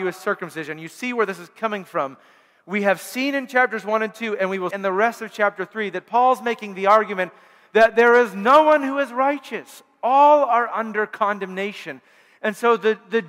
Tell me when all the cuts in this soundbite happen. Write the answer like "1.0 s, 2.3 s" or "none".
4.7 s